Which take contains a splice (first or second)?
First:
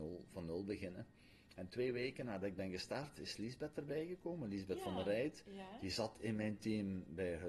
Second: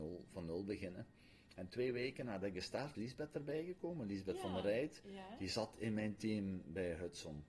second